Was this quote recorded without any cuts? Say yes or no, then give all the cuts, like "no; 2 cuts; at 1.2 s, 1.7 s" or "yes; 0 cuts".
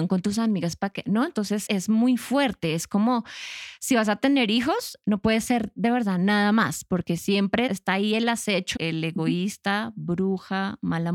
no; 3 cuts; at 1.7 s, 7.7 s, 8.8 s